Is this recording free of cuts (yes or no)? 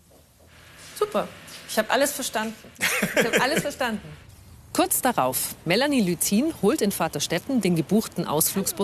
yes